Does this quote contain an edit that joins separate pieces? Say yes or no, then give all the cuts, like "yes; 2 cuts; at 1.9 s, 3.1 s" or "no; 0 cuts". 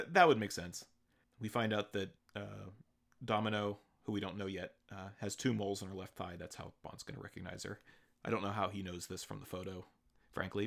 yes; 1 cut; at 2.2 s